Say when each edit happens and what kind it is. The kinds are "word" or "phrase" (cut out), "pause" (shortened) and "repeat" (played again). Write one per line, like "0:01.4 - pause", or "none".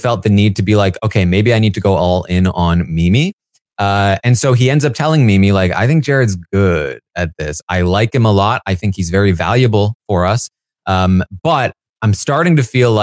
none